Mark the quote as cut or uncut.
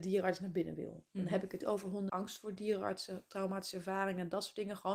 cut